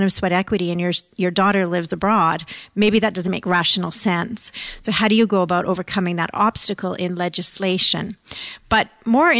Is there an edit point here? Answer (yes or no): no